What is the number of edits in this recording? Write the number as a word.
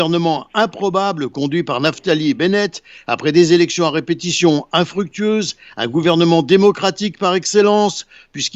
zero